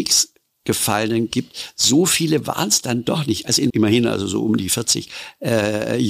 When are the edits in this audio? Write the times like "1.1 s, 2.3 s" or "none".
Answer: 3.7 s